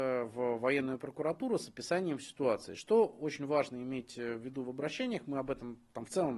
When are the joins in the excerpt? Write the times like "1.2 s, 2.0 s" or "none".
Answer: none